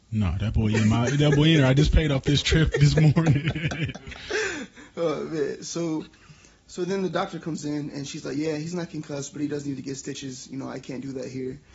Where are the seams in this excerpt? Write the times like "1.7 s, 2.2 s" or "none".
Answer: none